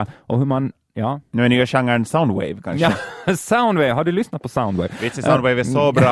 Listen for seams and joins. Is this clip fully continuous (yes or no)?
yes